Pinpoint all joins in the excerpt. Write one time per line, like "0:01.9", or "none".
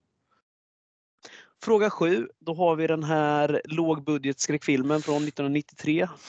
0:02.3